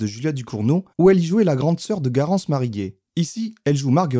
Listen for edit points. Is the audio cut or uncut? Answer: cut